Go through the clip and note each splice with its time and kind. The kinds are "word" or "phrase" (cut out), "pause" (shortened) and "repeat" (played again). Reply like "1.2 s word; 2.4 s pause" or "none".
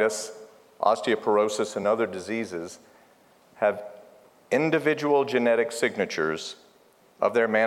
none